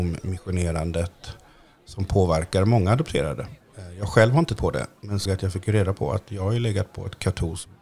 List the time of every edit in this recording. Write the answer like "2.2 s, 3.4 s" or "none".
4.6 s, 5.3 s